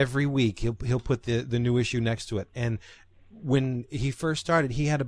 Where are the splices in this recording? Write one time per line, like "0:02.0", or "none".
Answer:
none